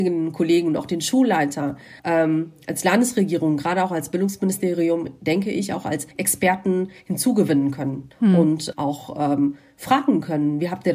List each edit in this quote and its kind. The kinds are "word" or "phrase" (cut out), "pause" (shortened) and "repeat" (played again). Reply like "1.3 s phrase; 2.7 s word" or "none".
2.0 s pause; 6.1 s pause; 8.1 s pause; 8.7 s word